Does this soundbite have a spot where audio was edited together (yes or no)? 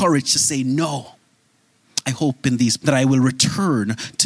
yes